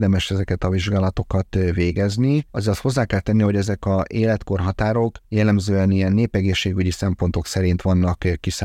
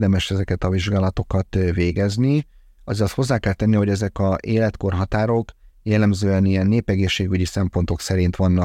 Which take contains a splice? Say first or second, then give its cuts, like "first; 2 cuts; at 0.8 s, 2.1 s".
first; 2 cuts; at 2.5 s, 5.2 s